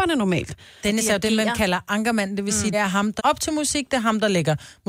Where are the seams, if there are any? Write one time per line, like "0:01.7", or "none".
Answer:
0:02.7
0:03.2